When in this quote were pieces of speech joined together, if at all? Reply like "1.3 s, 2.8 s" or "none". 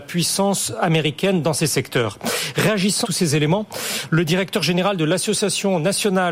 3.0 s